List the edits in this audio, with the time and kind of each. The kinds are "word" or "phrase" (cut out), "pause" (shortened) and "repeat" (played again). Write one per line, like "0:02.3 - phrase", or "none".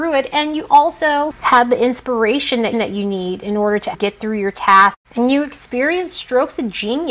0:02.7 - repeat
0:03.9 - word
0:05.0 - pause